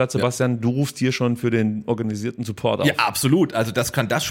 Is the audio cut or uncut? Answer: uncut